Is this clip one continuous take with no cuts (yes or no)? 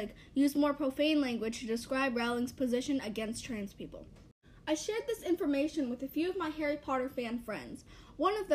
yes